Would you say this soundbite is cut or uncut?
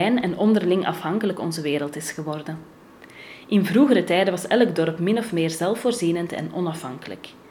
uncut